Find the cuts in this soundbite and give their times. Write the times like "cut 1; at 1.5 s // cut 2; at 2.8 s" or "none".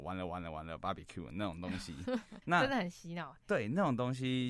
cut 1; at 2.4 s